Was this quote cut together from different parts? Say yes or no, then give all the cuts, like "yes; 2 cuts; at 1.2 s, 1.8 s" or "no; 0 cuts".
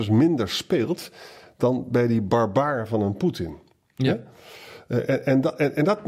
no; 0 cuts